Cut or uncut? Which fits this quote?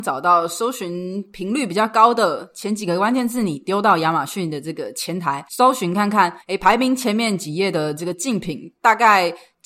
cut